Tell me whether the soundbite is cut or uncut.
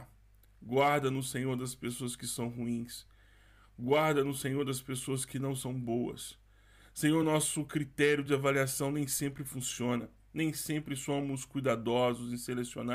uncut